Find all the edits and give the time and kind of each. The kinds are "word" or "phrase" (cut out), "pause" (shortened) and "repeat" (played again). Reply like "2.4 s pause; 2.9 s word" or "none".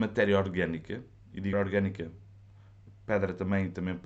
1.5 s word